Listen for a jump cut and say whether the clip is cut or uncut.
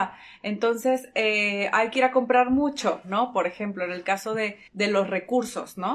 cut